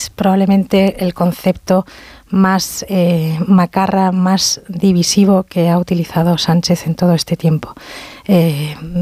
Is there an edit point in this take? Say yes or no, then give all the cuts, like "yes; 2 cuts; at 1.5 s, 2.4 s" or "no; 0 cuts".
no; 0 cuts